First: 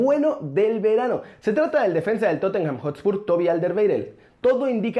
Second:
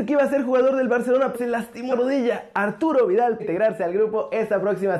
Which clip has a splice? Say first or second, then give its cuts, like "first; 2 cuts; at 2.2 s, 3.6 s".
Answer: second; 3 cuts; at 1.3 s, 1.9 s, 3.4 s